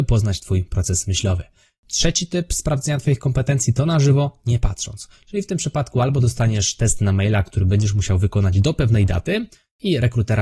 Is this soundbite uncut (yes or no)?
yes